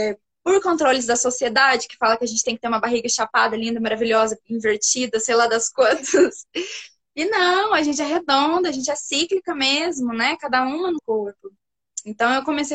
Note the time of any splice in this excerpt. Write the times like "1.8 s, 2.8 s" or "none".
11.0 s

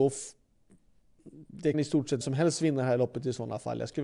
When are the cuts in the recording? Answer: 1.7 s, 2.2 s

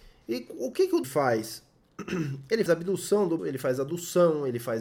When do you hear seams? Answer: 1.0 s, 2.7 s, 3.4 s

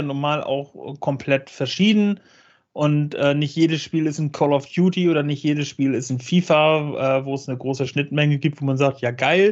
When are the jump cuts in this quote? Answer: none

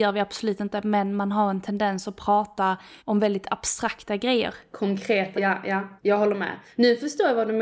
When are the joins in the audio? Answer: 3.0 s, 5.4 s, 6.0 s

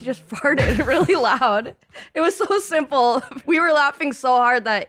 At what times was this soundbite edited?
3.4 s

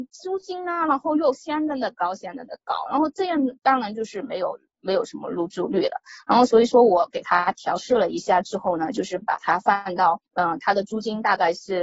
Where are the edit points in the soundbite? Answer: 3.6 s, 10.3 s

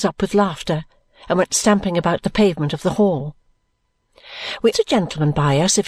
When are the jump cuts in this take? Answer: 4.7 s

